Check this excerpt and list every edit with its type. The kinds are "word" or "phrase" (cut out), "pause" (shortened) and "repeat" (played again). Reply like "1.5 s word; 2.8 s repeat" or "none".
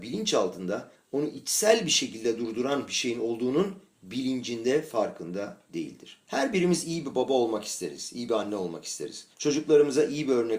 6.2 s pause; 9.3 s pause